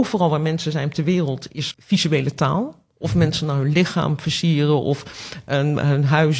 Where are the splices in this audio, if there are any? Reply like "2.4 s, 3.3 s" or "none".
1.7 s